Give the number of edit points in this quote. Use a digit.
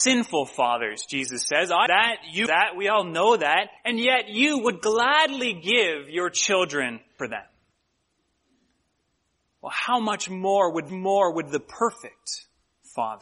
5